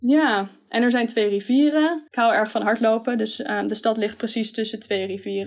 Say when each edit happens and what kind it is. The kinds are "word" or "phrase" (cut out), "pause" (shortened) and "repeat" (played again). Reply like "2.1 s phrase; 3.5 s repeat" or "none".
2.1 s pause